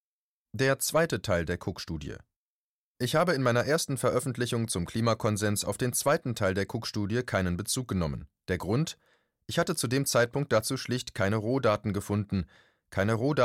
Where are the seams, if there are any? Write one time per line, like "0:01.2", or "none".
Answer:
0:08.4